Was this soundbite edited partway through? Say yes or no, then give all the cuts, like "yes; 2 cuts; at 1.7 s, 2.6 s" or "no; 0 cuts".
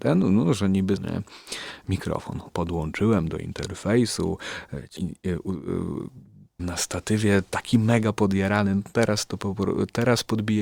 yes; 4 cuts; at 1.0 s, 2.5 s, 5.0 s, 6.6 s